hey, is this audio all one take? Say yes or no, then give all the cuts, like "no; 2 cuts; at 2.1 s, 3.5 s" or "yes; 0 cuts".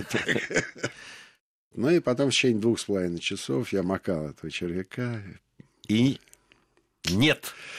yes; 0 cuts